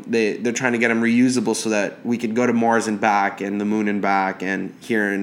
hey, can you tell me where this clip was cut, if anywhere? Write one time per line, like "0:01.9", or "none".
none